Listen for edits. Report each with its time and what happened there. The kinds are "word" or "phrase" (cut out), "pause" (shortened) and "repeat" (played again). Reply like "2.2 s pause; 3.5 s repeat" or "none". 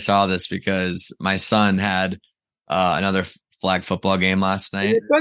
none